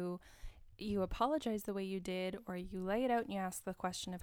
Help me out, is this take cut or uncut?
uncut